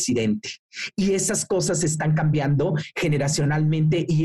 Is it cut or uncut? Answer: uncut